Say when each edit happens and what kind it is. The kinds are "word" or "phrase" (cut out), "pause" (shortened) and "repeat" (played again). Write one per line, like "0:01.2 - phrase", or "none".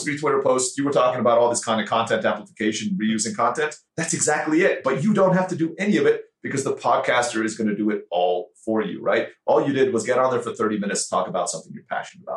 0:03.9 - pause

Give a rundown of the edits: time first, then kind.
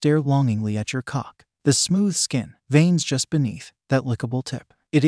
0:02.6 - pause

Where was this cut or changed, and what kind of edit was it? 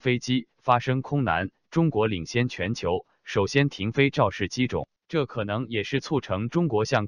0:05.0 - pause

